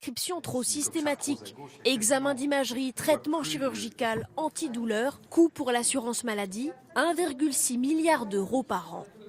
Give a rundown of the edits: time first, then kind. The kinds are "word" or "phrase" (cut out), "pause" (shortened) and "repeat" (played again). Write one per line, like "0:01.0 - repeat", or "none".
0:05.3 - pause

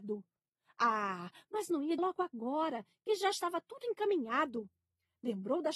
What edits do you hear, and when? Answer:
0:02.0 - word

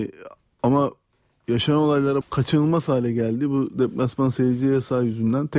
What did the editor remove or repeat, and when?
0:02.2 - phrase

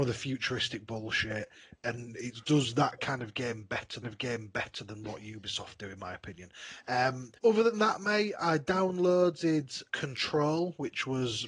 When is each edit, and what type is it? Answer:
0:02.4 - word
0:04.0 - repeat
0:07.4 - pause
0:09.9 - word

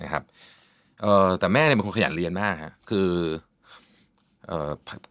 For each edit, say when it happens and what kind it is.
0:02.8 - pause

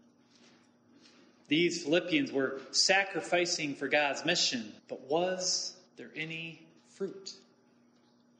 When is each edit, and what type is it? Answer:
0:04.8 - pause
0:05.9 - pause
0:06.8 - pause

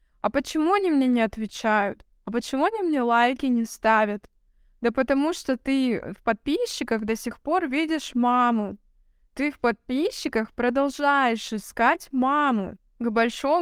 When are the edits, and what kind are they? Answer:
none

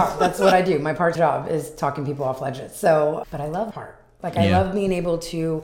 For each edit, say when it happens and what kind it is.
0:01.2 - word
0:03.2 - word
0:03.7 - word

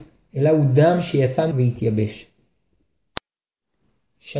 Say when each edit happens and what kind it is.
0:01.5 - word

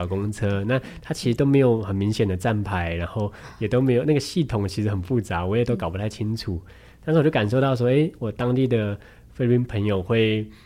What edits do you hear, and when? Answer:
none

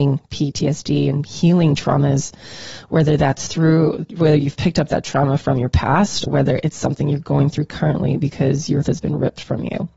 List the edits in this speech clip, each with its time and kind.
0:06.3 - word
0:08.8 - word

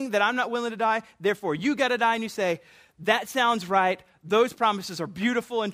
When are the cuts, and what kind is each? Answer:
0:04.5 - word

